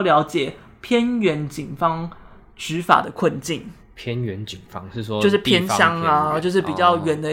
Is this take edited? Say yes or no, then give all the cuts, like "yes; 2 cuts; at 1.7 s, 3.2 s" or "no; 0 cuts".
yes; 1 cut; at 3.8 s